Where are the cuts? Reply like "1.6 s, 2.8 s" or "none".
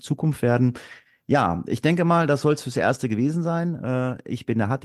none

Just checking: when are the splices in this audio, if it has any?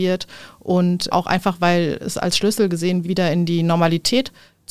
1.1 s, 3.0 s

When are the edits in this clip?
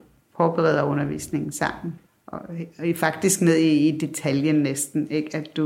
2.1 s

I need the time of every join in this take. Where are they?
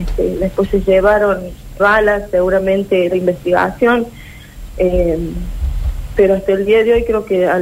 1.8 s, 3.1 s

